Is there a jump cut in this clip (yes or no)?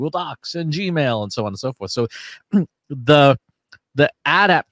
no